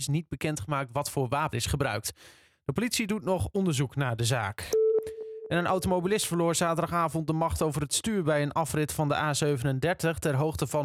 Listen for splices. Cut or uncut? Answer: cut